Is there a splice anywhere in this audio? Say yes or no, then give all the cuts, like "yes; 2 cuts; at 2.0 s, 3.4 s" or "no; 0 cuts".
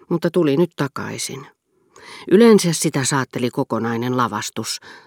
no; 0 cuts